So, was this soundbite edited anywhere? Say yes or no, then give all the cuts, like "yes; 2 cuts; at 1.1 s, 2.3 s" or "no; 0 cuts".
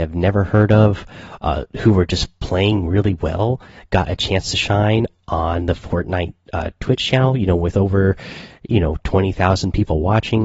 no; 0 cuts